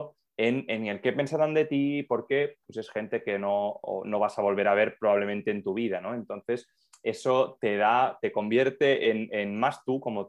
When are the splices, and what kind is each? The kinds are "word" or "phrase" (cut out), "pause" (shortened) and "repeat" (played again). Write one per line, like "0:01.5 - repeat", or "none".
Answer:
none